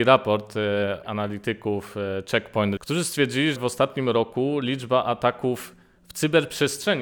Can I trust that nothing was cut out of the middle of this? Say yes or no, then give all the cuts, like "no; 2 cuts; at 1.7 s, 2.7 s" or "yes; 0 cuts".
no; 3 cuts; at 1.0 s, 2.8 s, 3.6 s